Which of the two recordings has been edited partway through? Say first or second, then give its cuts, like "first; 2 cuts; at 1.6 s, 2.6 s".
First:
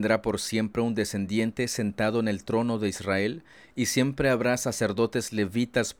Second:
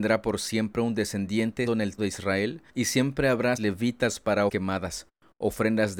second; 5 cuts; at 1.7 s, 2.0 s, 2.7 s, 3.6 s, 4.5 s